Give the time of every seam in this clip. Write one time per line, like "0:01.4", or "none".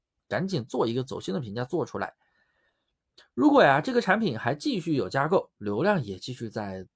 none